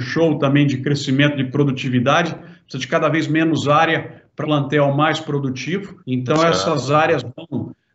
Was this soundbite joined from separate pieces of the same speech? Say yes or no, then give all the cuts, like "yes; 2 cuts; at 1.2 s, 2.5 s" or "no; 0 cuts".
yes; 2 cuts; at 4.4 s, 6.0 s